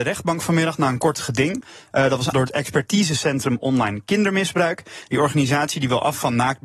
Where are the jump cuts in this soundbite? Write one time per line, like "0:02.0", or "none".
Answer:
0:02.3